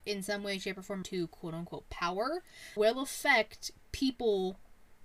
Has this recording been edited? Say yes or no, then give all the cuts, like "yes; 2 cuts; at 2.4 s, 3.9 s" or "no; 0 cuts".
yes; 2 cuts; at 1.0 s, 2.8 s